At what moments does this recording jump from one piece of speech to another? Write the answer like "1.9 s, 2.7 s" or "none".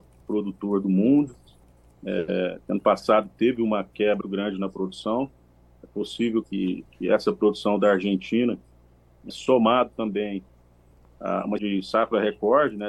4.2 s, 6.4 s, 9.3 s, 11.6 s